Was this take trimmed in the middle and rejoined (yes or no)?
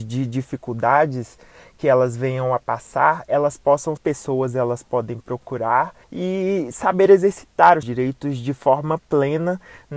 yes